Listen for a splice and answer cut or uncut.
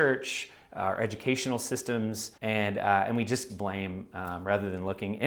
cut